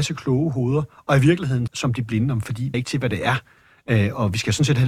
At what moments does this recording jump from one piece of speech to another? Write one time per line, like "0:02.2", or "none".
0:01.7
0:02.4
0:02.7